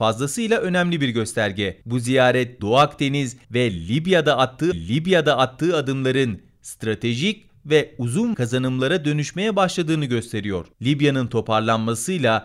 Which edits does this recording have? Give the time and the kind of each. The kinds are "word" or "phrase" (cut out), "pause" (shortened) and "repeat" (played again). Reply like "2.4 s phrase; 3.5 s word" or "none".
1.8 s pause; 2.6 s word; 3.4 s pause; 4.7 s repeat; 8.3 s word; 10.7 s pause